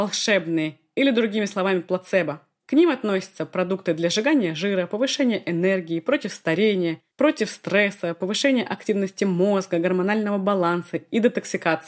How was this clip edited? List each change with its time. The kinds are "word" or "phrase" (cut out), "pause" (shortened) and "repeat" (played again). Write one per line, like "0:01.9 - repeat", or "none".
0:07.1 - pause